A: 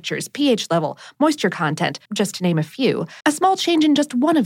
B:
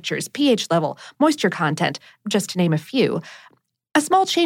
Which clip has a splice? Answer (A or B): A